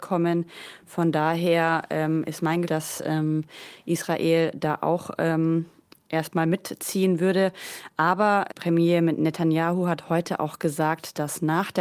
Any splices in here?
yes; 2 cuts; at 2.6 s, 8.5 s

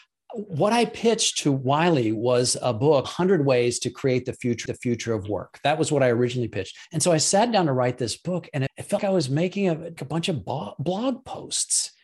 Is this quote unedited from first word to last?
no; 6 cuts; at 3.0 s, 4.7 s, 6.8 s, 8.7 s, 9.0 s, 10.0 s

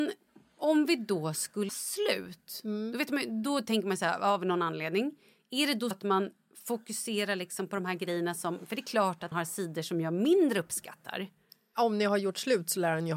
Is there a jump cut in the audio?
yes; 3 cuts; at 1.7 s, 5.9 s, 9.3 s

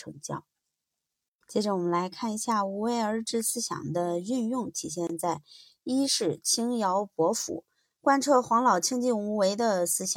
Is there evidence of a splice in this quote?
no; 0 cuts

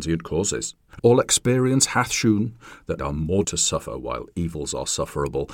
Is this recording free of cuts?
no; 3 cuts; at 1.0 s, 3.0 s, 3.4 s

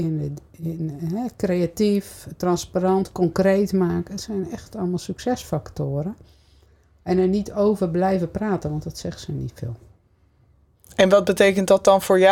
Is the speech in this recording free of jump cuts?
yes; 0 cuts

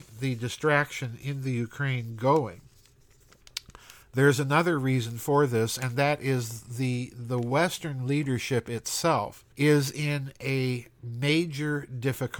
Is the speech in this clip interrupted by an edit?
yes; 1 cut; at 9.5 s

